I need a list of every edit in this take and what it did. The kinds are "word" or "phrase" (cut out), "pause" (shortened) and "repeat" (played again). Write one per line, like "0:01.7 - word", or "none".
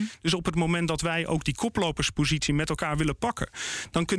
none